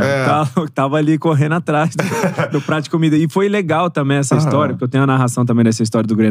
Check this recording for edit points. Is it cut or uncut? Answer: uncut